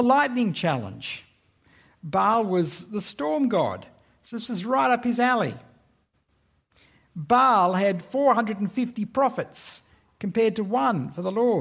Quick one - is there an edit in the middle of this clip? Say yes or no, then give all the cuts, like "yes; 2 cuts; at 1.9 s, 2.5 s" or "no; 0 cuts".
no; 0 cuts